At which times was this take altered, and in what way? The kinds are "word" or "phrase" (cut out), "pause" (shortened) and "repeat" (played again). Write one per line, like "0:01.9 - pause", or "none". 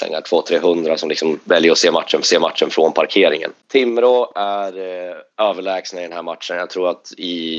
0:02.2 - repeat